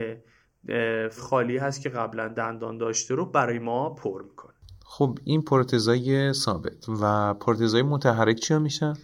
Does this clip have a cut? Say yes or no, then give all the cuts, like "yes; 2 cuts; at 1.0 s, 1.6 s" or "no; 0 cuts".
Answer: yes; 2 cuts; at 1.2 s, 4.8 s